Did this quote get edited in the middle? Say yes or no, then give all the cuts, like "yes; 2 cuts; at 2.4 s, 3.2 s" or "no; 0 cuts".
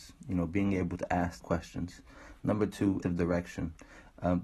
yes; 2 cuts; at 1.4 s, 3.0 s